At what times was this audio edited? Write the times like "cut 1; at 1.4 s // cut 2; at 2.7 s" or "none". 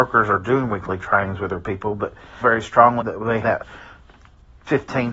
cut 1; at 2.4 s // cut 2; at 3.0 s // cut 3; at 3.4 s